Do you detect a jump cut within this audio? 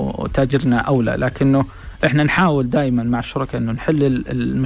no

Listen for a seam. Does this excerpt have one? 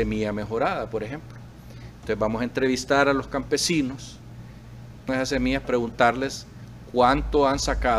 yes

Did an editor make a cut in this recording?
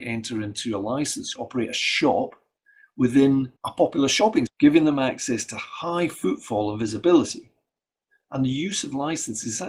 yes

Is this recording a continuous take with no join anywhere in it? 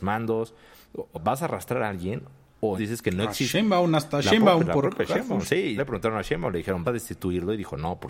no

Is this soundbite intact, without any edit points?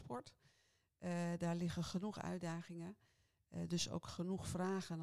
yes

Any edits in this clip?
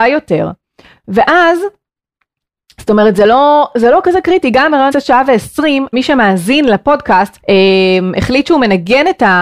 yes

